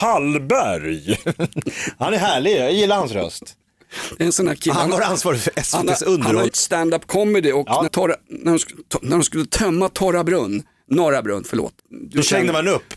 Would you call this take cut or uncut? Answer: cut